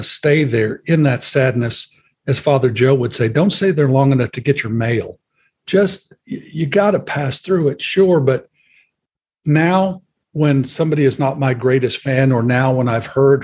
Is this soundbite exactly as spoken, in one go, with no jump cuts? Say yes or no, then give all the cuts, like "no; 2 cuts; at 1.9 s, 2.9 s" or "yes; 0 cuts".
yes; 0 cuts